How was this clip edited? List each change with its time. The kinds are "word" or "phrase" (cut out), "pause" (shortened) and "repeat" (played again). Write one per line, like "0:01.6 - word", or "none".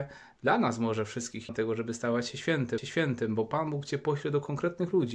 0:01.5 - word
0:02.8 - repeat